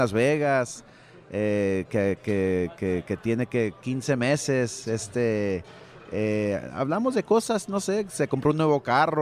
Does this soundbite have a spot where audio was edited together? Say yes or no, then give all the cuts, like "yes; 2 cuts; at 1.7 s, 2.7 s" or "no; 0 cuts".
no; 0 cuts